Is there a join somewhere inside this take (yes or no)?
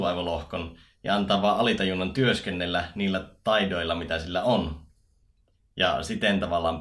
no